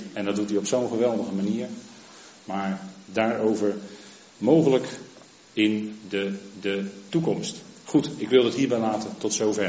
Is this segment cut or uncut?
cut